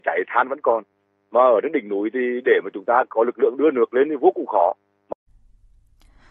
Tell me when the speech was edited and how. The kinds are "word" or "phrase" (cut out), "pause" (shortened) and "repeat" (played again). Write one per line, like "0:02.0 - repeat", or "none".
none